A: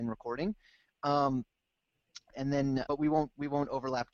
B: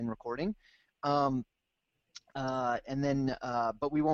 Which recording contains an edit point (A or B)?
A